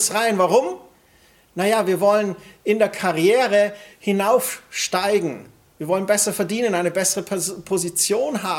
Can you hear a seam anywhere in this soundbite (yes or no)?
no